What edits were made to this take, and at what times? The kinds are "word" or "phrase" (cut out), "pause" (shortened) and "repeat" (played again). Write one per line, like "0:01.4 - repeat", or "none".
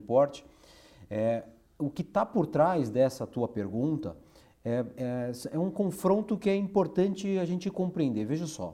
none